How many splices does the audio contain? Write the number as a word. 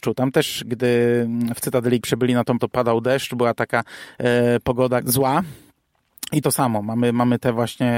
four